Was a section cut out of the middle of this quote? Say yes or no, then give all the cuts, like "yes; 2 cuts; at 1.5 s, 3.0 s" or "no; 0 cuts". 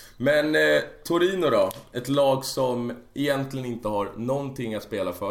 no; 0 cuts